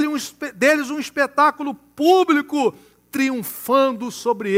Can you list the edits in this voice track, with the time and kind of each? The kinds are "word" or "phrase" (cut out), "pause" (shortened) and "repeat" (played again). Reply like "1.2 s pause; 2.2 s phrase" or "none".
none